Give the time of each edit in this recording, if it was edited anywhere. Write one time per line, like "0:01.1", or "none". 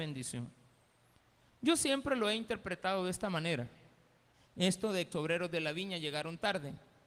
0:04.3
0:05.1